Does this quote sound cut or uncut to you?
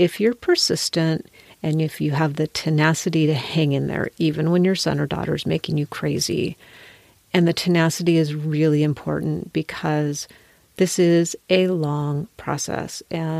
uncut